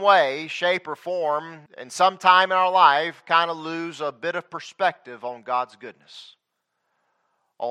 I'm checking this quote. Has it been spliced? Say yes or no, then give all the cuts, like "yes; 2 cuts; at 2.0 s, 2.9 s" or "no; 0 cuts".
yes; 1 cut; at 1.7 s